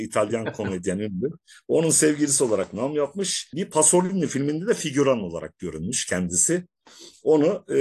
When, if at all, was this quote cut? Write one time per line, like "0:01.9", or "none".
none